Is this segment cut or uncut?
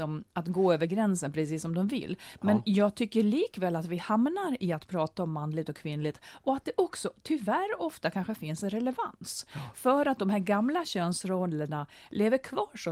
uncut